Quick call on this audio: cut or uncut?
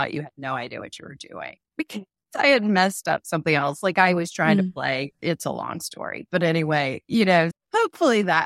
cut